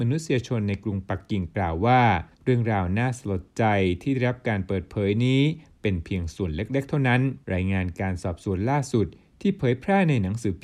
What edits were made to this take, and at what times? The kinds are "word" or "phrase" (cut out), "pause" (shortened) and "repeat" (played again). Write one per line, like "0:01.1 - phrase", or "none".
0:02.3 - pause
0:07.4 - pause